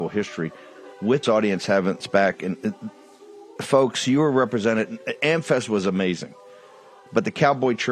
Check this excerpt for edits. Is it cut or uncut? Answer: cut